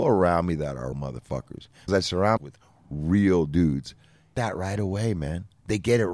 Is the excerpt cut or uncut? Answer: cut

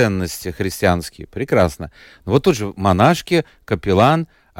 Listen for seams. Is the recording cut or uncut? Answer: uncut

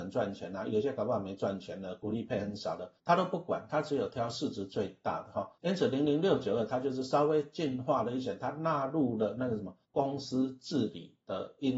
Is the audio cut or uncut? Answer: cut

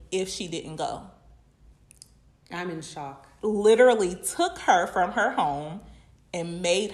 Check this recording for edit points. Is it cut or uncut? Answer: uncut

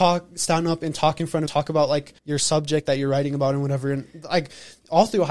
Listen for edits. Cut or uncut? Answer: cut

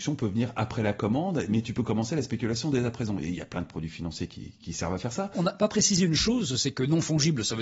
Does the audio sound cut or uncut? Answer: uncut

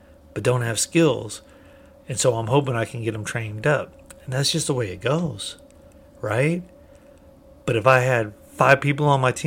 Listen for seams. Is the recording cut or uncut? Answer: uncut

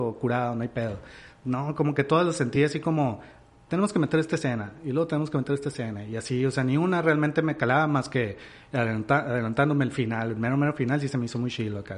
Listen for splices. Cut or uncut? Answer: uncut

